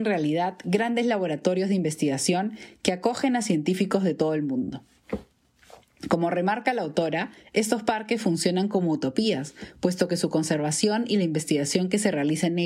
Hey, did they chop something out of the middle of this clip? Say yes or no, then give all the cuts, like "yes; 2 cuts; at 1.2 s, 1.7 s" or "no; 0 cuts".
no; 0 cuts